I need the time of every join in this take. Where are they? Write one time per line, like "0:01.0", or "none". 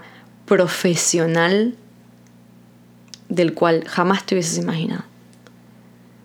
none